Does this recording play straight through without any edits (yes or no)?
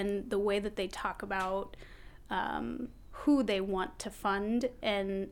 yes